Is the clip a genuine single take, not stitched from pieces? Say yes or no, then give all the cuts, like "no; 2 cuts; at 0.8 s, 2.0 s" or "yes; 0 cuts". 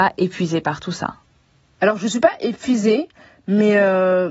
yes; 0 cuts